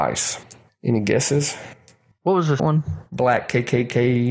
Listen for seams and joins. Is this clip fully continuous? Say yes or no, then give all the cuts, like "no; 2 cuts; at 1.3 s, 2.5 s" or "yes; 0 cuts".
no; 1 cut; at 2.6 s